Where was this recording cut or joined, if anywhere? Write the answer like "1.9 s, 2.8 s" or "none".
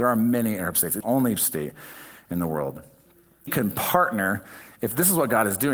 1.0 s, 1.4 s, 3.5 s